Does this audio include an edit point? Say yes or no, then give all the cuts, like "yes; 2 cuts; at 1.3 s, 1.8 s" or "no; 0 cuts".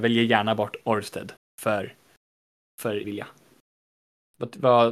yes; 2 cuts; at 1.4 s, 3.0 s